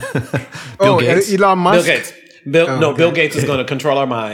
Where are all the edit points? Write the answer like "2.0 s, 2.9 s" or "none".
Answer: none